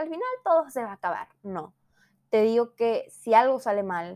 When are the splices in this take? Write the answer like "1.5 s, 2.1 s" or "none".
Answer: none